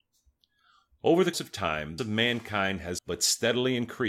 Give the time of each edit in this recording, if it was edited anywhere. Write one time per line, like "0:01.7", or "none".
0:01.3
0:02.0
0:03.0